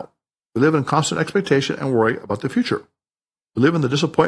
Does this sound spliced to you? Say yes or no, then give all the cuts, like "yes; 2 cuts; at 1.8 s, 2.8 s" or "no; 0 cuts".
no; 0 cuts